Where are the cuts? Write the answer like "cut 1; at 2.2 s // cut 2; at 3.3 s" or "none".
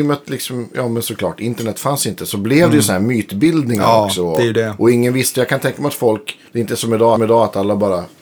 cut 1; at 6.5 s // cut 2; at 7.2 s